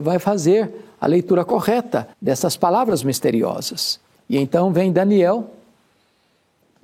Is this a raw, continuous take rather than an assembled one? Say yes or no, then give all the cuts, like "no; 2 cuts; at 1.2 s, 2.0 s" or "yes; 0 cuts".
no; 2 cuts; at 2.1 s, 4.1 s